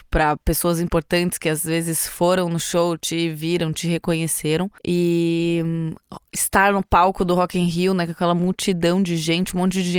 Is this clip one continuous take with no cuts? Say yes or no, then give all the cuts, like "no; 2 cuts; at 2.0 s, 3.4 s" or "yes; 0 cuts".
no; 1 cut; at 4.8 s